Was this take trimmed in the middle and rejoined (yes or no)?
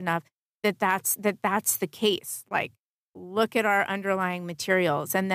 no